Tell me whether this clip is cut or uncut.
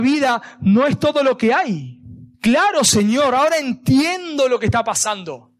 cut